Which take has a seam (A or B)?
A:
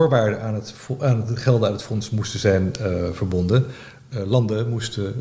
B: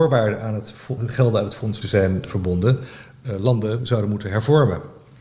B